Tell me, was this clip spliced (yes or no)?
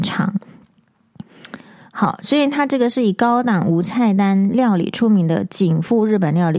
no